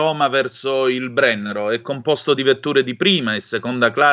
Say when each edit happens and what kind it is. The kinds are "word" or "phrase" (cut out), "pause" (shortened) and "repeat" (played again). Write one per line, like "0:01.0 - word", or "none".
none